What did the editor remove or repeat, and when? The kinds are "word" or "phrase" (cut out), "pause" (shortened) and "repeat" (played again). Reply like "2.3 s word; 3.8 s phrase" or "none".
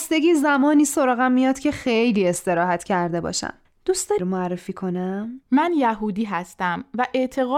3.7 s pause; 4.2 s phrase; 5.4 s pause